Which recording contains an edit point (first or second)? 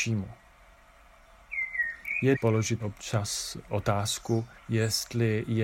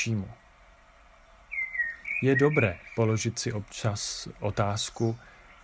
first